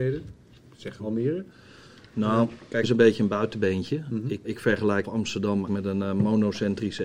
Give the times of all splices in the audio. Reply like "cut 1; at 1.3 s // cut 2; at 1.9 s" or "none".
cut 1; at 1.0 s // cut 2; at 2.8 s // cut 3; at 4.4 s // cut 4; at 5.0 s // cut 5; at 5.7 s